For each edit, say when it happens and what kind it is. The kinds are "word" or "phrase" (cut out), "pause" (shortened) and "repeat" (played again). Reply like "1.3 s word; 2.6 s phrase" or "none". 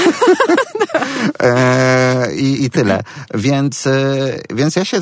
2.6 s word